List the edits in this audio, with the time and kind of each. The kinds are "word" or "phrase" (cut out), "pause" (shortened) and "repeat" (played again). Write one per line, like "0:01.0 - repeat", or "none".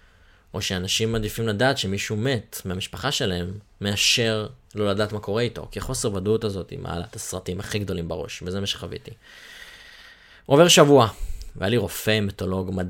none